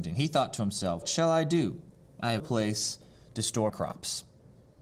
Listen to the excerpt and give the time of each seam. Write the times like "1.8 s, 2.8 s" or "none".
1.0 s, 2.4 s, 3.7 s

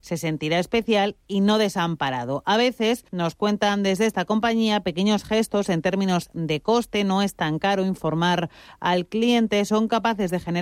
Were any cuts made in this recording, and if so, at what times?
3.1 s

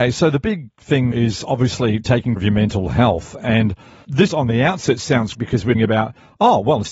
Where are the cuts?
1.1 s, 2.4 s, 4.3 s, 5.3 s, 5.7 s

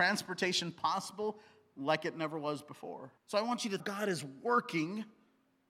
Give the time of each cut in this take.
3.2 s, 3.8 s

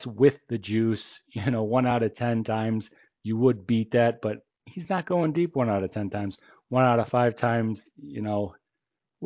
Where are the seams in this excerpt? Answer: none

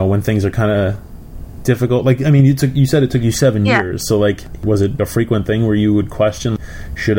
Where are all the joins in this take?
none

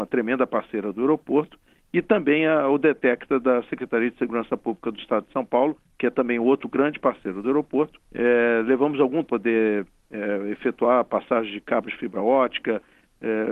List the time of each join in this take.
8.0 s, 9.2 s

